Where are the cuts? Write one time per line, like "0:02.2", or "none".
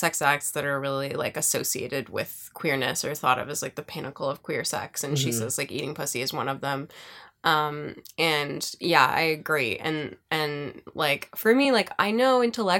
none